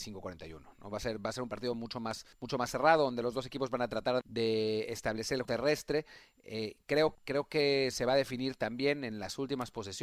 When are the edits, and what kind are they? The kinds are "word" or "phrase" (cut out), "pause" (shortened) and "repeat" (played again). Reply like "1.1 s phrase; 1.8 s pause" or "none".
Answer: 2.3 s pause; 4.2 s word; 5.4 s word; 7.1 s word